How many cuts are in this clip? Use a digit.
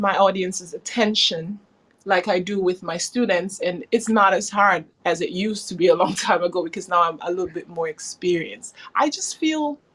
1